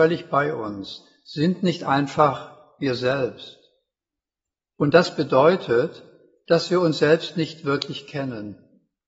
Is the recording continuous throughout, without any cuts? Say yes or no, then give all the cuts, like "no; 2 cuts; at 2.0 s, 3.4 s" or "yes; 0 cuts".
yes; 0 cuts